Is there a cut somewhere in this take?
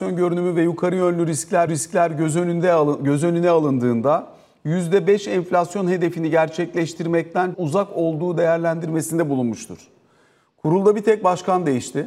yes; 2 cuts; at 1.7 s, 7.5 s

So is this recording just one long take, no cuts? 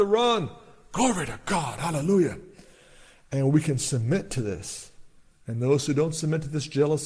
yes; 0 cuts

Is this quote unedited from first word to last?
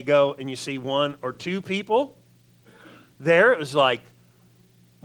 yes; 0 cuts

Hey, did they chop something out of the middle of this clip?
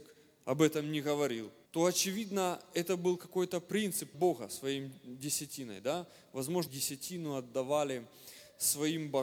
yes; 3 cuts; at 1.7 s, 4.1 s, 6.7 s

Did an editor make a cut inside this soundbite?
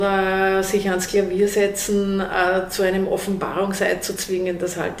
no; 0 cuts

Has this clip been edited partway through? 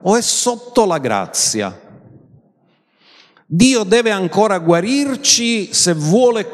no; 0 cuts

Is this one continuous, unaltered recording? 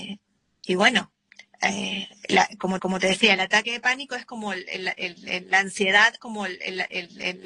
no; 2 cuts; at 2.8 s, 6.2 s

